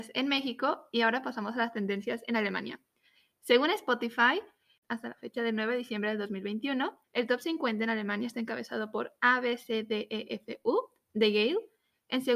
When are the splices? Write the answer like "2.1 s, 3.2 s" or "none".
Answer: 7.0 s